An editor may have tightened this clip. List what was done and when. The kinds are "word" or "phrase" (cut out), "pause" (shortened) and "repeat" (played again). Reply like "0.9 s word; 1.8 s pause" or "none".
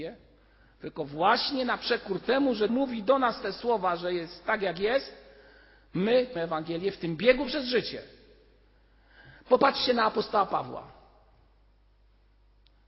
2.7 s word; 6.4 s word